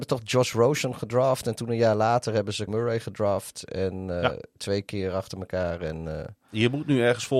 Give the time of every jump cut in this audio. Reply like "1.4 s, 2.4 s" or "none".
2.7 s